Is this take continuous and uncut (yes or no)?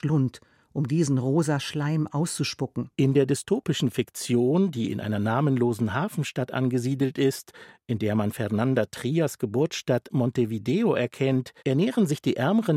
no